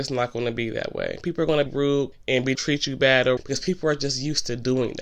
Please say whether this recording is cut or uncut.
cut